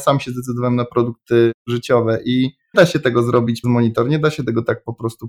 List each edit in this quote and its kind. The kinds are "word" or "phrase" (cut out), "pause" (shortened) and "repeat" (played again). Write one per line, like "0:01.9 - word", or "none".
0:02.7 - word
0:03.6 - word